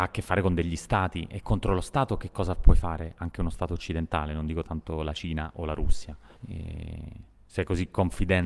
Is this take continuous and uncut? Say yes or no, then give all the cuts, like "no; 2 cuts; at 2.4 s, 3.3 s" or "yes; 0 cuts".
no; 1 cut; at 6.4 s